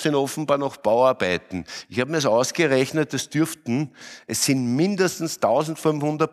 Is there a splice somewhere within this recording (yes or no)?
no